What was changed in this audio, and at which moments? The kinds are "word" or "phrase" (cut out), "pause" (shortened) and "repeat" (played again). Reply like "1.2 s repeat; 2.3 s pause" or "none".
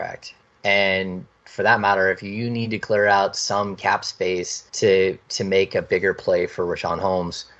4.7 s pause